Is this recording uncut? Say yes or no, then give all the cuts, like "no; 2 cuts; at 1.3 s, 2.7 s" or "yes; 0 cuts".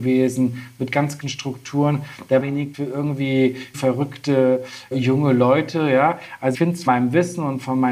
no; 7 cuts; at 1.2 s, 2.4 s, 2.7 s, 3.7 s, 4.9 s, 6.5 s, 6.9 s